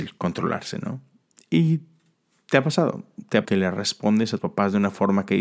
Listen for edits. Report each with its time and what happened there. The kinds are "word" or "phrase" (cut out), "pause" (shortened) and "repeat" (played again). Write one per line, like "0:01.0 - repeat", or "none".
0:03.4 - word
0:04.4 - word